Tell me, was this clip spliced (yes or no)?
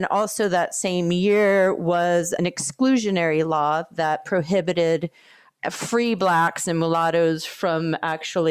yes